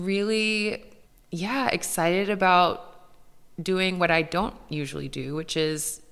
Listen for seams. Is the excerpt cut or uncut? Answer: cut